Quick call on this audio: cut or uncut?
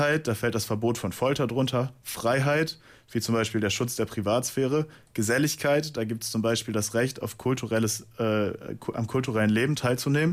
uncut